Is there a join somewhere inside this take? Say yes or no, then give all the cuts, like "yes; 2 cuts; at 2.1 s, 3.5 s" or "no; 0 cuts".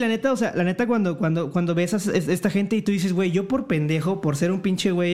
no; 0 cuts